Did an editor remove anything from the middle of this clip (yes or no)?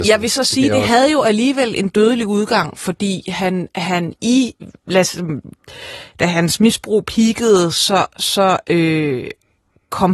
no